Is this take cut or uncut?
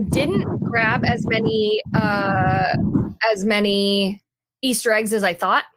cut